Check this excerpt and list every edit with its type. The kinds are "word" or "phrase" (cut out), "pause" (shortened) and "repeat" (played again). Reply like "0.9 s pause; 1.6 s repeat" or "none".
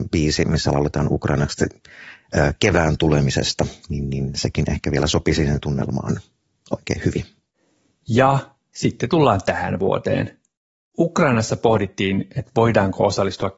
3.8 s pause